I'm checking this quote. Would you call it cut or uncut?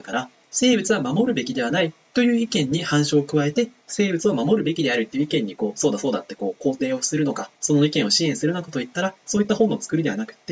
cut